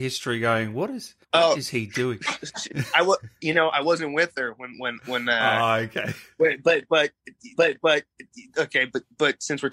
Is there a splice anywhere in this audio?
yes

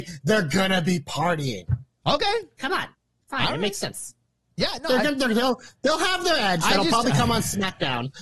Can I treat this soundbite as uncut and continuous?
yes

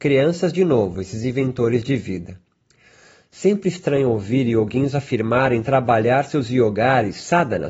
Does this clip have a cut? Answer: no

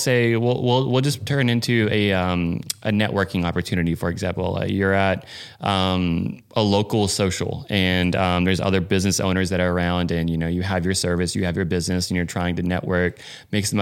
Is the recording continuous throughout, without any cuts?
yes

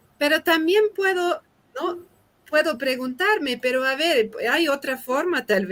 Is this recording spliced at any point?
no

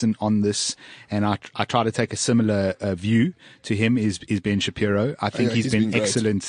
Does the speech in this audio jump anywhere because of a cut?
no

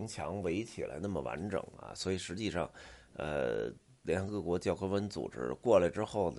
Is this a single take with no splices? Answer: yes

